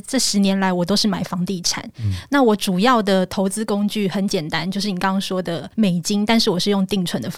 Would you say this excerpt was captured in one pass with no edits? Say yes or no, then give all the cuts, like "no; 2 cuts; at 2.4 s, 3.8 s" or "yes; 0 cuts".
no; 1 cut; at 5.7 s